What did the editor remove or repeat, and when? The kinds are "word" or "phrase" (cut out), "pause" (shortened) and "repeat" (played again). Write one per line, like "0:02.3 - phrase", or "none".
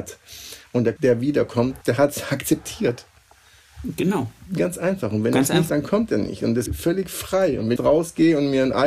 0:01.0 - word
0:01.8 - pause
0:05.7 - word
0:06.7 - word
0:07.8 - phrase